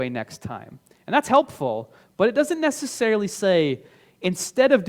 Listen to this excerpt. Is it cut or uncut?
uncut